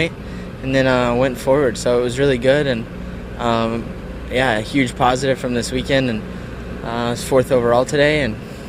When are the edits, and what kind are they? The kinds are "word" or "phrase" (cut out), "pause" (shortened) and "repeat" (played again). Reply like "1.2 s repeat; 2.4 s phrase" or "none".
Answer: none